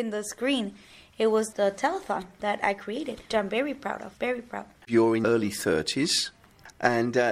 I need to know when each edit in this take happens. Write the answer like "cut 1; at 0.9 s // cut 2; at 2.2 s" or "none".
cut 1; at 1.5 s // cut 2; at 3.3 s // cut 3; at 4.2 s // cut 4; at 5.2 s